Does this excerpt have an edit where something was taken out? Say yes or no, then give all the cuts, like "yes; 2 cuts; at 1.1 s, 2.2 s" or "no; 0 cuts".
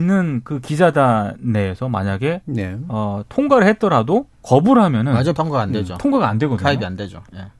yes; 2 cuts; at 4.3 s, 5.3 s